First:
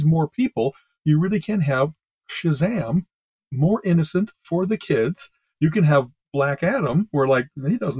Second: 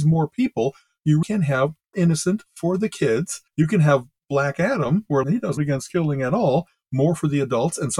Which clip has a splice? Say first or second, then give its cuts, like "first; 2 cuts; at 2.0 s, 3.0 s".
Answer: second; 5 cuts; at 1.2 s, 1.9 s, 3.5 s, 5.2 s, 5.6 s